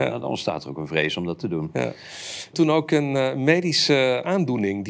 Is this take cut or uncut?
cut